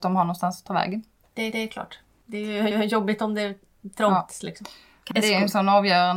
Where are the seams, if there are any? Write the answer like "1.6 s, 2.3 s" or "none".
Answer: 1.5 s, 2.7 s, 5.1 s